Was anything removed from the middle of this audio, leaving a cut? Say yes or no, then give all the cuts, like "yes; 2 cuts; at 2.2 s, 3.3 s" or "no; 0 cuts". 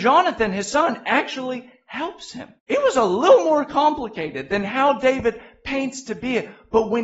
yes; 1 cut; at 2.6 s